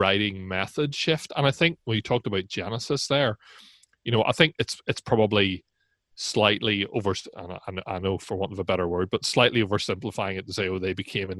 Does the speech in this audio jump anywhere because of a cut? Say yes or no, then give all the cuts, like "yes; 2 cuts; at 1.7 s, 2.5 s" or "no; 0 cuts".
no; 0 cuts